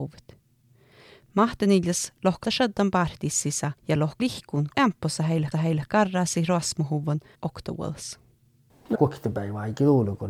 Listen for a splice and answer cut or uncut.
cut